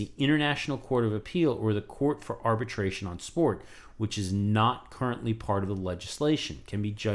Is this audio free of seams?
yes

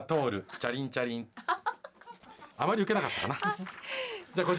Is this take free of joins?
no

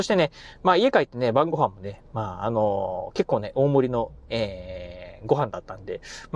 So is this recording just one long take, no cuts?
yes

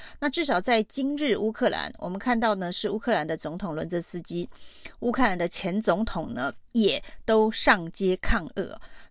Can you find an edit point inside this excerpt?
yes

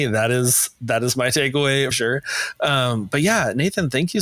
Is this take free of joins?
no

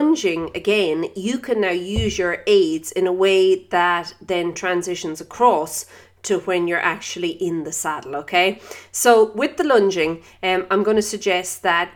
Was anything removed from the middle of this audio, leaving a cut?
no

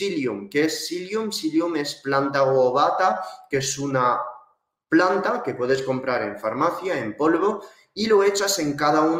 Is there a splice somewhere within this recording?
no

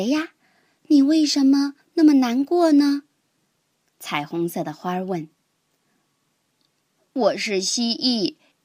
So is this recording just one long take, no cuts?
yes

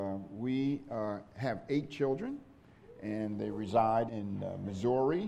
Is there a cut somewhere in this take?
yes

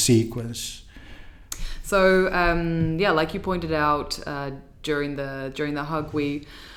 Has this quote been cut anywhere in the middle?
no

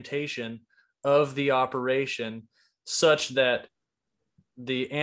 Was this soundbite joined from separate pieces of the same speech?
no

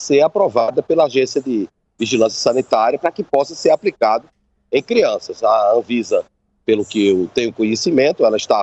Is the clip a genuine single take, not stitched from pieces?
yes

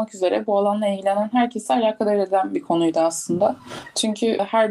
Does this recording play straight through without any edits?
yes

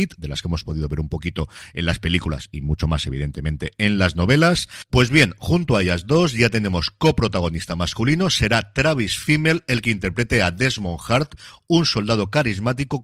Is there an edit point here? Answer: no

